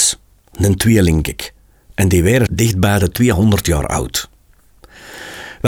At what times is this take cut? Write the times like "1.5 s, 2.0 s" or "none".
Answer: 1.2 s, 2.5 s